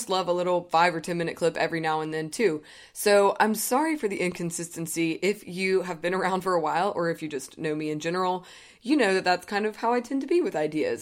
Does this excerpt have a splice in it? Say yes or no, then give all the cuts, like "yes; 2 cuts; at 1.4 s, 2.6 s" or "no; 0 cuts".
no; 0 cuts